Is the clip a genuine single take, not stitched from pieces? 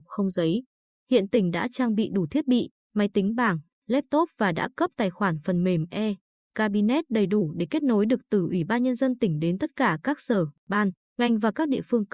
yes; 0 cuts

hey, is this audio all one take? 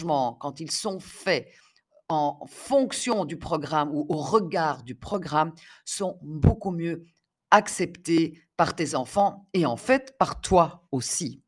yes; 0 cuts

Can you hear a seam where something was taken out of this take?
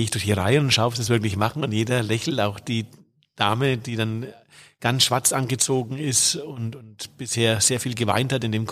no; 0 cuts

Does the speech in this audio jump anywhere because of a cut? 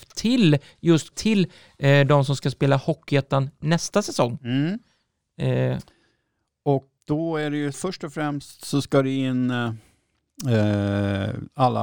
yes; 3 cuts; at 1.1 s, 7.0 s, 7.7 s

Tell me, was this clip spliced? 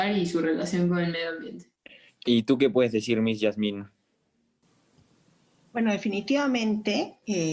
no; 0 cuts

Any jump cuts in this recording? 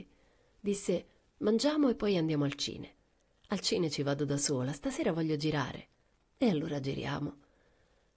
no; 0 cuts

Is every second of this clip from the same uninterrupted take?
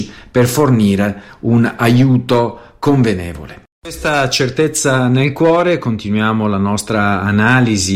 yes; 0 cuts

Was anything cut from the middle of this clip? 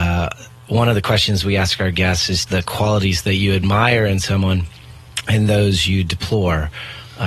yes; 1 cut; at 2.4 s

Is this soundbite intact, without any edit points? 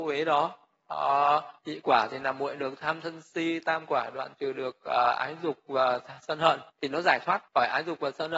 no; 3 cuts; at 1.6 s, 6.7 s, 7.5 s

